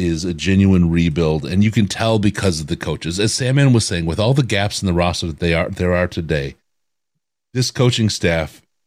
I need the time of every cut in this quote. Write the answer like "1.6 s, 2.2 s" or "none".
none